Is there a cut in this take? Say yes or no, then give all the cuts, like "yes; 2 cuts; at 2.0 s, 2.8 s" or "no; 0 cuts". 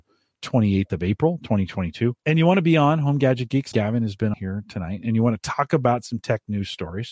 yes; 3 cuts; at 2.2 s, 3.7 s, 4.3 s